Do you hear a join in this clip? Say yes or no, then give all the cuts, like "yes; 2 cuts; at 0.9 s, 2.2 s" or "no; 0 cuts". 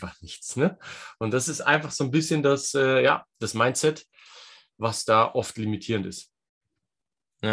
no; 0 cuts